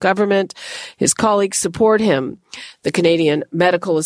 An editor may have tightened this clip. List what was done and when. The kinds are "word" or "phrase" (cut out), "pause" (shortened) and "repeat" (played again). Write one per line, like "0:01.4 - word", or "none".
none